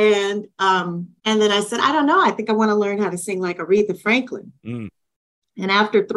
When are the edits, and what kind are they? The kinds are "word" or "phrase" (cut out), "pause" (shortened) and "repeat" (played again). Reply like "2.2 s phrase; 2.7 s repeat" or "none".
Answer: 1.2 s pause; 4.6 s pause

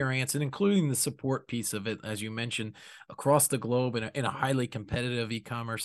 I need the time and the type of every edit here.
none

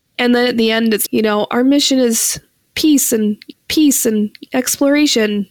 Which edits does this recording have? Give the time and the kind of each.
1.1 s word; 3.5 s repeat

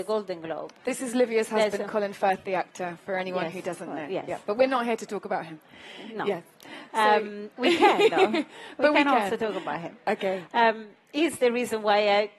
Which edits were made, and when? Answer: none

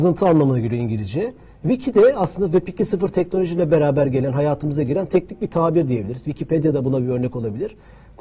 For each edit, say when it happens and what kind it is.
none

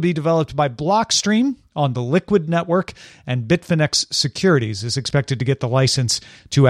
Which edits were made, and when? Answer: none

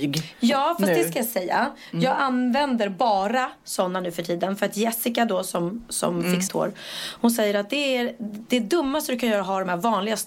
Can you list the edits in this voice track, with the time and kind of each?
6.5 s word

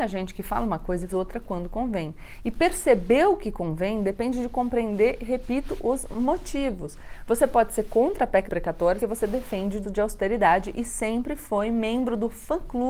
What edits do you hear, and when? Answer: 1.1 s word; 8.5 s word; 9.0 s word; 9.8 s word

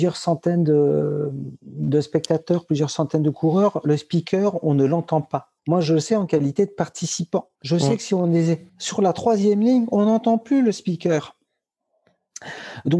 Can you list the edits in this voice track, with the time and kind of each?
5.6 s pause; 7.5 s pause; 8.7 s pause

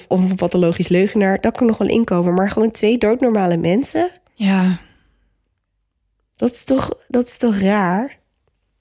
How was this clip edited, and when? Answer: none

